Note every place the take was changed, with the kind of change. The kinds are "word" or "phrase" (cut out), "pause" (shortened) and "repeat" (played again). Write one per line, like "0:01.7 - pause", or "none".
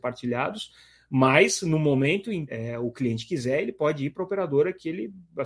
0:02.5 - word